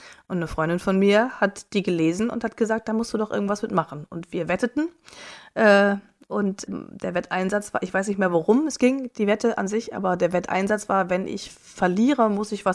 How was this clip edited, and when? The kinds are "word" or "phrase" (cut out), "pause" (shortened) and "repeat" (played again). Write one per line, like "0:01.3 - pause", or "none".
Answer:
0:06.7 - word